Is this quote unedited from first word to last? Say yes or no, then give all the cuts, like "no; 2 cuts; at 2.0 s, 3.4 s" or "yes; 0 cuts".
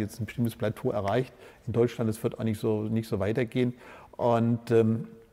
yes; 0 cuts